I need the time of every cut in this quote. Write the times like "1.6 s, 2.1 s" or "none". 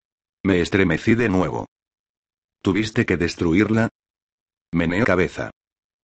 5.0 s